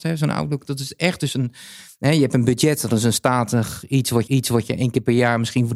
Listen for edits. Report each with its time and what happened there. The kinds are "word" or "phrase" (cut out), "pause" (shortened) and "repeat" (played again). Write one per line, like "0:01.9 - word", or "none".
0:04.3 - repeat